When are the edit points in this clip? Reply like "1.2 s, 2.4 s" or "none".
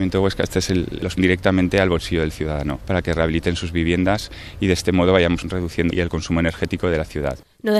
1.2 s, 5.9 s